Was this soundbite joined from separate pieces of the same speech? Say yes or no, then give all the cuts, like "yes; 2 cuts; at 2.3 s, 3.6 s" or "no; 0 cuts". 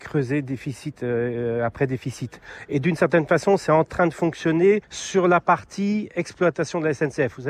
yes; 1 cut; at 4.8 s